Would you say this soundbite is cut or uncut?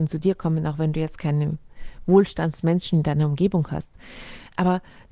uncut